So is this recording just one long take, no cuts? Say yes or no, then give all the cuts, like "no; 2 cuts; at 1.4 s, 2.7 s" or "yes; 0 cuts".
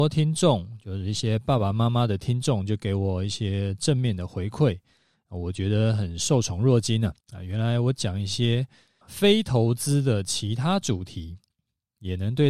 no; 2 cuts; at 7.2 s, 9.0 s